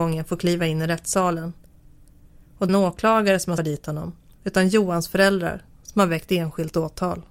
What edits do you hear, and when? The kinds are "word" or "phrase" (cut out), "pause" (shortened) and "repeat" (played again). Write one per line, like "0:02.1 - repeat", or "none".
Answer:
0:02.7 - phrase
0:03.6 - word